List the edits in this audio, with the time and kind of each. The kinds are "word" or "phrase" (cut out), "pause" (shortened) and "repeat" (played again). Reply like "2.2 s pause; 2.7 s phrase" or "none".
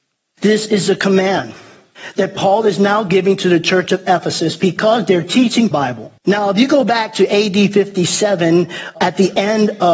5.7 s phrase; 6.2 s pause